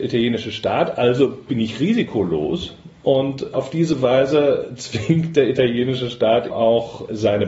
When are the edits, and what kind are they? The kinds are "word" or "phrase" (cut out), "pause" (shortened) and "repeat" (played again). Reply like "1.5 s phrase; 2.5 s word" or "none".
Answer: 6.5 s word